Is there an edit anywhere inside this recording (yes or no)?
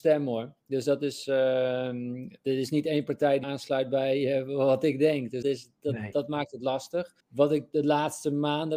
yes